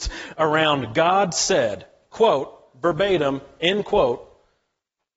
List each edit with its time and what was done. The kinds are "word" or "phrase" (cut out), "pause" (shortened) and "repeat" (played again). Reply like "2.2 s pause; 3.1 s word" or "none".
none